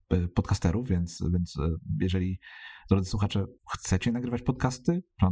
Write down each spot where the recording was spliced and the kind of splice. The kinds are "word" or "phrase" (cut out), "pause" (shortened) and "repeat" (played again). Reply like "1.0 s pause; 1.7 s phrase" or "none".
3.6 s pause